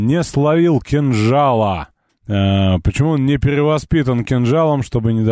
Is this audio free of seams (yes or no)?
no